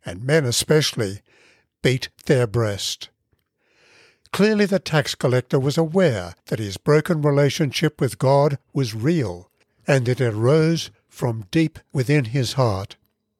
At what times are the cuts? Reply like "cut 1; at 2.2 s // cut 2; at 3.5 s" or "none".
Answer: none